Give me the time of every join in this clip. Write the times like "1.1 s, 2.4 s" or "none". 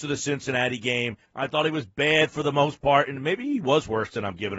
1.2 s